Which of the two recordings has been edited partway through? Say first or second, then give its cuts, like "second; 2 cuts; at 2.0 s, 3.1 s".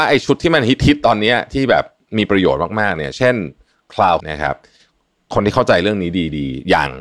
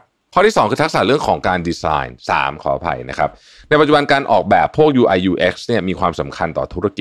first; 1 cut; at 4.2 s